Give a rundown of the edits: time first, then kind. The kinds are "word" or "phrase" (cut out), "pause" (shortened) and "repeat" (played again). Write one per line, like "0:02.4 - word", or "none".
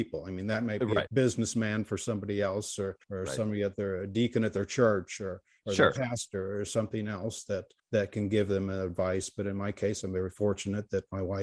0:01.1 - word
0:03.0 - pause
0:07.8 - pause